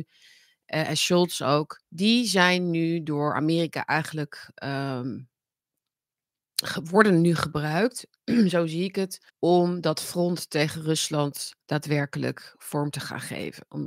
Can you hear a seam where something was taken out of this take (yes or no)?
yes